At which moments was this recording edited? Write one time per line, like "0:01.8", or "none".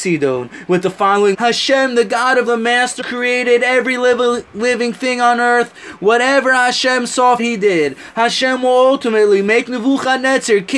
0:01.3
0:02.5
0:03.0
0:07.4